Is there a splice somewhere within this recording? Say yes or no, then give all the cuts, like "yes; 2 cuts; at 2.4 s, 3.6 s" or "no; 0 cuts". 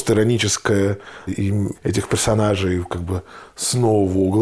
yes; 2 cuts; at 1.3 s, 1.7 s